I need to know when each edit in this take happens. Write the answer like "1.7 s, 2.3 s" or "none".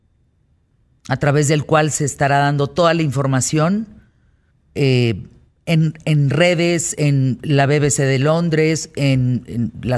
4.5 s